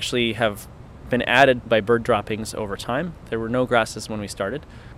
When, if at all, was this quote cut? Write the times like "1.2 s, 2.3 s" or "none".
1.7 s